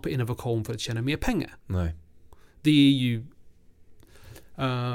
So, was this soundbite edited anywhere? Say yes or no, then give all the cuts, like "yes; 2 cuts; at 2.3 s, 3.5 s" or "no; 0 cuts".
no; 0 cuts